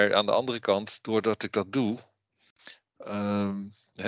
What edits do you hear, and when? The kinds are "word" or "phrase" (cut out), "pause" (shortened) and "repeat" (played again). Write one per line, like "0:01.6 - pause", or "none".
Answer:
none